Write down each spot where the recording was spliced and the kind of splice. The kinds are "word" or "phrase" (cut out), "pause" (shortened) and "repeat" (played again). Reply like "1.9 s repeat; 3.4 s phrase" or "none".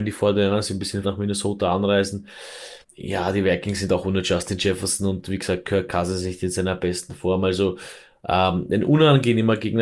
1.0 s phrase; 2.8 s pause